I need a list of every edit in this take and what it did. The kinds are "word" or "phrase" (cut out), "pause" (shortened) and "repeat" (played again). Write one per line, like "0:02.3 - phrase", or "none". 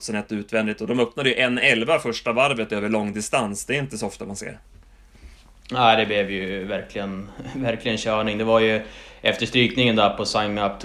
none